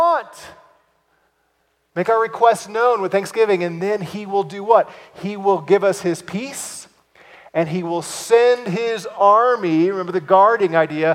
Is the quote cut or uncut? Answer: uncut